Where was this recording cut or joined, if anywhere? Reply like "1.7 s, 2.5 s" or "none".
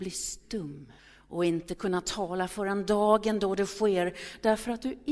1.0 s